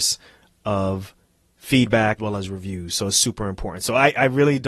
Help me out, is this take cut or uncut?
cut